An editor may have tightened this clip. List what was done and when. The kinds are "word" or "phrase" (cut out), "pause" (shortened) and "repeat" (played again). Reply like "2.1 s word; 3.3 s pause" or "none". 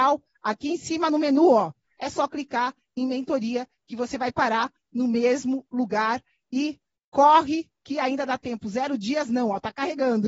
none